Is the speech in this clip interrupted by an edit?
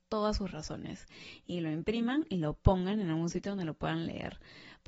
no; 0 cuts

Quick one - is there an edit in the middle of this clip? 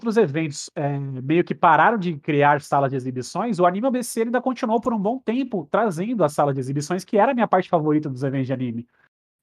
no; 0 cuts

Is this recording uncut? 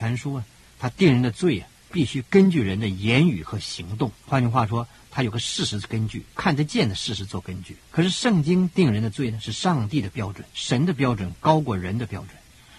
no; 5 cuts; at 1.8 s, 4.2 s, 6.3 s, 7.8 s, 10.5 s

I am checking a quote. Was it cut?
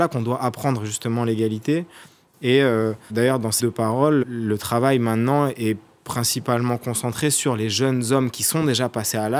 yes; 3 cuts; at 3.1 s, 3.6 s, 4.2 s

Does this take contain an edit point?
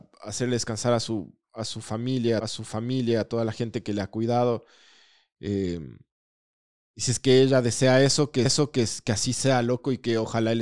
yes; 2 cuts; at 2.4 s, 8.4 s

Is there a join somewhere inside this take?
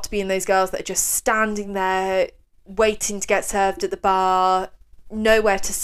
no; 0 cuts

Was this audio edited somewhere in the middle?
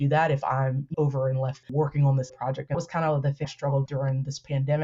yes; 6 cuts; at 0.9 s, 1.6 s, 2.3 s, 2.7 s, 3.4 s, 3.9 s

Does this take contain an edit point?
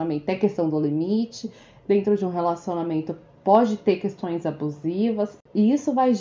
no; 0 cuts

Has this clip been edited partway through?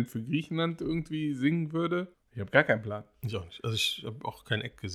yes; 1 cut; at 2.1 s

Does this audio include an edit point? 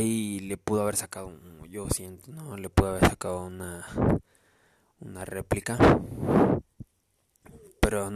no; 0 cuts

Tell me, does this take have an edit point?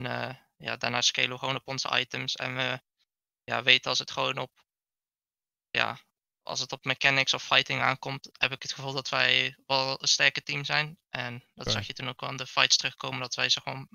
no; 0 cuts

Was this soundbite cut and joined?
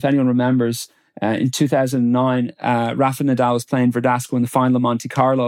no; 0 cuts

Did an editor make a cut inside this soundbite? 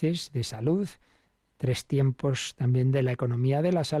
no; 0 cuts

